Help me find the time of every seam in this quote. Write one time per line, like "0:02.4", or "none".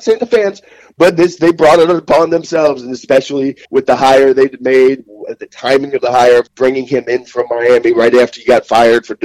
0:03.6
0:06.5